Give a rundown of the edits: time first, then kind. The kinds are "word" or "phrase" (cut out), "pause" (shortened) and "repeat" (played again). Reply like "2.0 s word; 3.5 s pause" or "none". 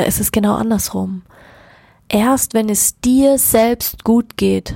none